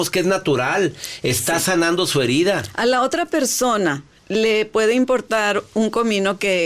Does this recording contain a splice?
no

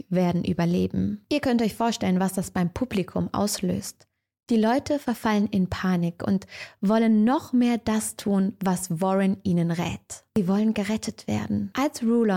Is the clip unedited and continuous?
yes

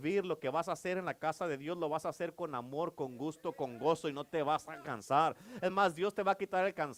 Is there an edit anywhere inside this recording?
no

